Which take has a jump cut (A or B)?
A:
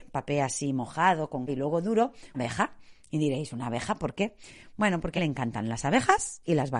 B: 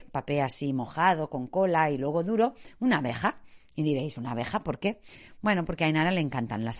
A